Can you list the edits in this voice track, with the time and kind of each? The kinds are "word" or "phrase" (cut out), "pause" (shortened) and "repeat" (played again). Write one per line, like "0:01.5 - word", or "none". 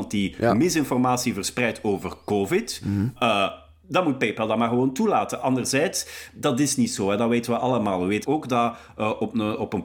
0:08.2 - word